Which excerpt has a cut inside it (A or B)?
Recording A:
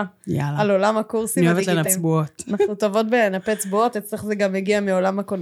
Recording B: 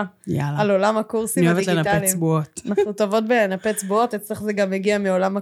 A